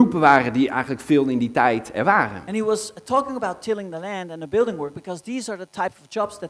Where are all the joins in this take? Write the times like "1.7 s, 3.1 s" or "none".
none